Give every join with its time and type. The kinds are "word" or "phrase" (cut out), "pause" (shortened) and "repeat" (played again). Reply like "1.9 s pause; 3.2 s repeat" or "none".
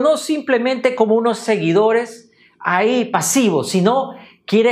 none